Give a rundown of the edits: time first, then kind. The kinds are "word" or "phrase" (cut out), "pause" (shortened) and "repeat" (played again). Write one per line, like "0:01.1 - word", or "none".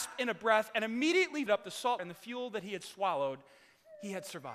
0:01.5 - word
0:02.0 - word